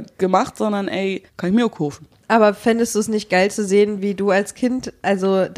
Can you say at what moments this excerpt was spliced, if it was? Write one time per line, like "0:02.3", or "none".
0:01.3